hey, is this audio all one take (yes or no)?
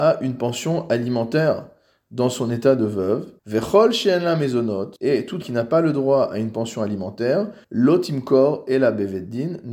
no